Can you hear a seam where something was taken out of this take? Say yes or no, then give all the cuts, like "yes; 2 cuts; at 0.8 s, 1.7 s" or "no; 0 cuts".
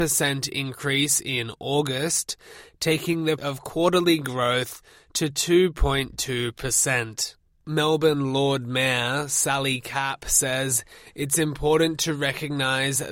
yes; 1 cut; at 3.4 s